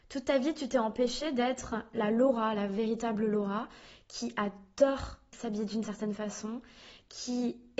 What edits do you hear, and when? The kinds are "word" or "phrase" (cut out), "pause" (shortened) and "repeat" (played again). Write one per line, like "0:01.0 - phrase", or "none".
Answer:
none